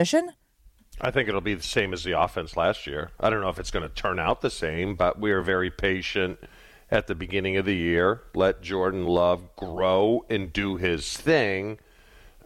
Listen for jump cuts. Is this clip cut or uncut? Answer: uncut